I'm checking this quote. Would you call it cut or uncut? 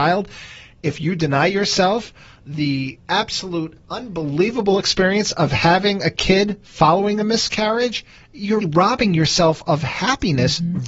cut